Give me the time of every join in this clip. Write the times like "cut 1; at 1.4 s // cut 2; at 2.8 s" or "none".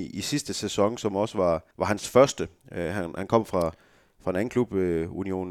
cut 1; at 1.7 s